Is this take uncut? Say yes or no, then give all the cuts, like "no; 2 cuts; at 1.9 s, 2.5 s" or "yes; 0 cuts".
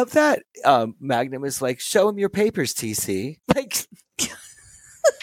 no; 1 cut; at 3.4 s